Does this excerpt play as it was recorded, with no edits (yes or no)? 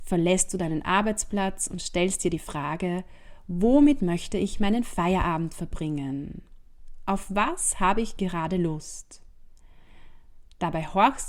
yes